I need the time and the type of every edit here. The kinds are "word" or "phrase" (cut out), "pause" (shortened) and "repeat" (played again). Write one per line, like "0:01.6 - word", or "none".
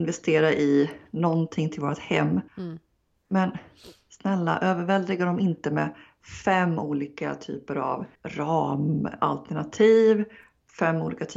0:02.5 - pause
0:08.1 - pause